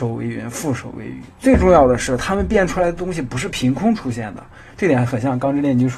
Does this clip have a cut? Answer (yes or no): no